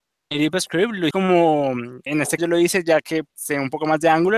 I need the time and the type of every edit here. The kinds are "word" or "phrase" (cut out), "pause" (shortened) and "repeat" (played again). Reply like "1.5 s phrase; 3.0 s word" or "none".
1.1 s word; 2.1 s word; 2.4 s word; 3.3 s word